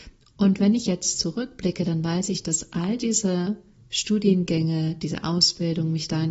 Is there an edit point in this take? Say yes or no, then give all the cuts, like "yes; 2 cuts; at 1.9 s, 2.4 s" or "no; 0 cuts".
no; 0 cuts